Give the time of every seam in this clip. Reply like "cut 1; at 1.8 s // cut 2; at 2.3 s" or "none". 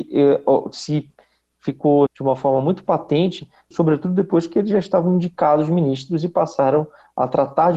cut 1; at 2.1 s // cut 2; at 3.7 s